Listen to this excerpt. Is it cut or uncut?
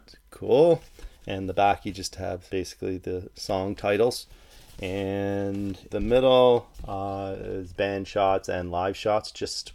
cut